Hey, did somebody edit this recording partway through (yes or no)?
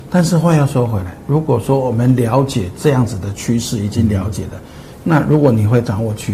no